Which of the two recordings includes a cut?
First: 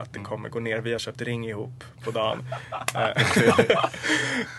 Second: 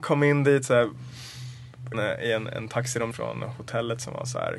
second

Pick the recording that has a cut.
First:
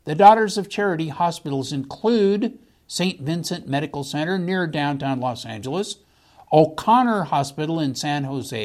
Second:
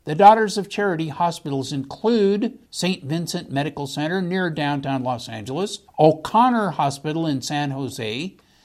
second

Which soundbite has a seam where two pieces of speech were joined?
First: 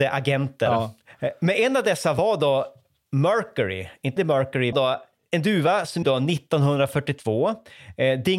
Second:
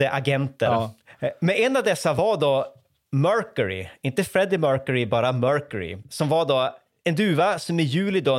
first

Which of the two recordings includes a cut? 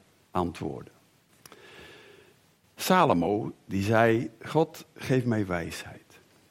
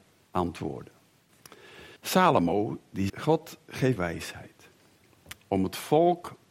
second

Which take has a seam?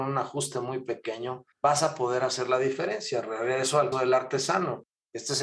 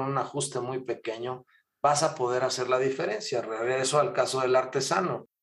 first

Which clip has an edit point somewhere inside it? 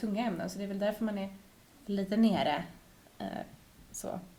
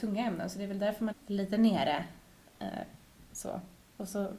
second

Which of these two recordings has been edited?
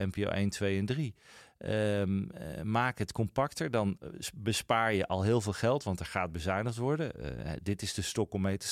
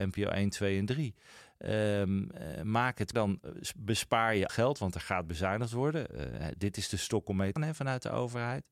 second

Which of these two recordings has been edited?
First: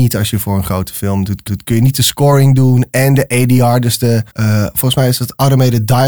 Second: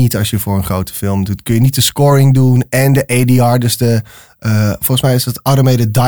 first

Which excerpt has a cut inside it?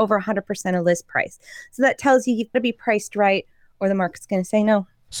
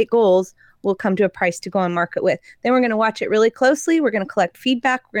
first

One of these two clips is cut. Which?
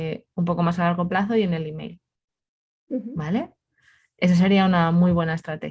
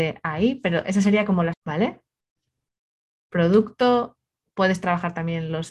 second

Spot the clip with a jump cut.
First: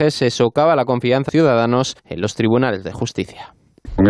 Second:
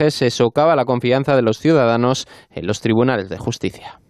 first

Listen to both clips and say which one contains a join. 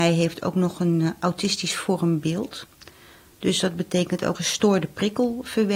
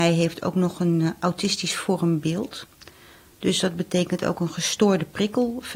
first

